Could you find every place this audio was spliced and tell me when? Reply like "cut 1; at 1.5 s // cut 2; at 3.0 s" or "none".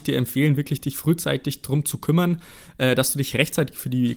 none